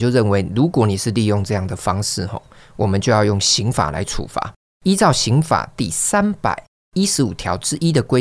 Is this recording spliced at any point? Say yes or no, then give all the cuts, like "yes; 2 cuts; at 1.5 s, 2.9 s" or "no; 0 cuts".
no; 0 cuts